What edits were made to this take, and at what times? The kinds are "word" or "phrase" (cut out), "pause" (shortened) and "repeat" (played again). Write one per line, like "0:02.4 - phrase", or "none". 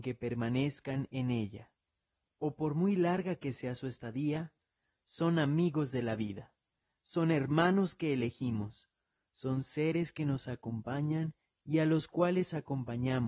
none